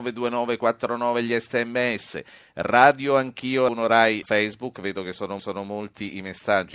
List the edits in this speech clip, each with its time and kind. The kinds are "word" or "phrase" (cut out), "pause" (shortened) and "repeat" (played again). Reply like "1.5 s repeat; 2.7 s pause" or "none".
3.7 s word; 4.2 s phrase; 5.4 s repeat